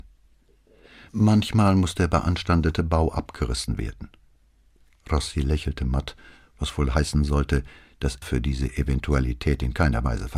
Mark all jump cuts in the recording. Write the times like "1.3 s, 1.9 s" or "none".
8.2 s